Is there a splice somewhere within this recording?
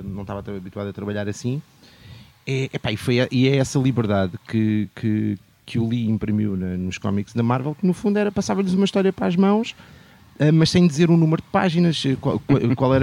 no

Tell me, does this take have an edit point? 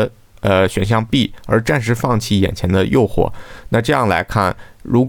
no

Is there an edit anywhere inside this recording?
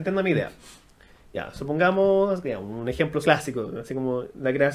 yes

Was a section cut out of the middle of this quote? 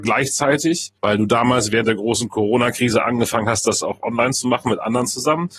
yes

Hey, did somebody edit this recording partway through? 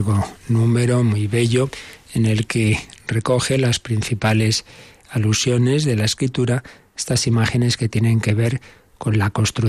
no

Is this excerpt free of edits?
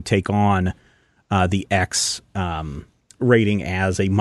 yes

